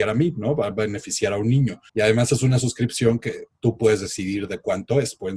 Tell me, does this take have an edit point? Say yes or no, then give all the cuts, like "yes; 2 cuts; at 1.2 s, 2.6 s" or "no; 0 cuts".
yes; 1 cut; at 1.9 s